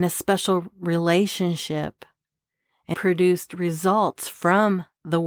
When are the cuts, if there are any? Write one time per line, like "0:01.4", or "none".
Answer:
0:02.9